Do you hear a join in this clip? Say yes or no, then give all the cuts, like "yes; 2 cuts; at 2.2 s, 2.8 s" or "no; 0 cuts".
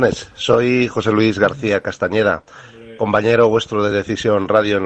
no; 0 cuts